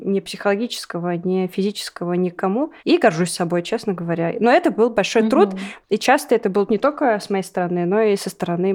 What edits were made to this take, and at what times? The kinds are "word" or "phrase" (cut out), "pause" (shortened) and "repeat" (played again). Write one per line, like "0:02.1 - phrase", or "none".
0:02.8 - pause
0:06.7 - word

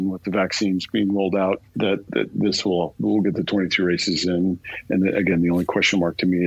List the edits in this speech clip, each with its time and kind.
0:02.1 - word

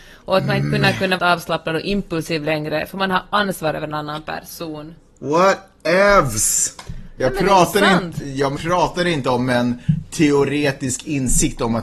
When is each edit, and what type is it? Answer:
0:01.2 - phrase
0:08.6 - word

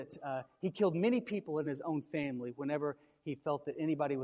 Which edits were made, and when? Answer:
none

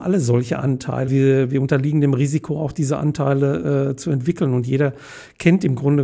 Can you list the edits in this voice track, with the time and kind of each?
0:01.1 - word

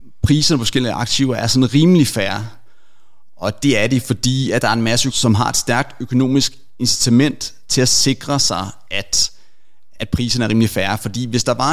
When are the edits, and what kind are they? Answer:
0:05.1 - phrase
0:09.9 - word

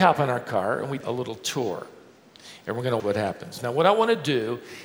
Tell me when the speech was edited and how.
0:01.0 - word
0:03.0 - word

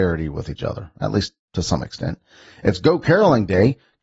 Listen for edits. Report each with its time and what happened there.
none

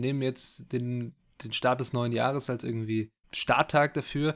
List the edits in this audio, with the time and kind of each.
0:03.2 - pause

